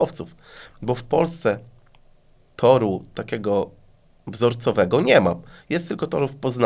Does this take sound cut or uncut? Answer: uncut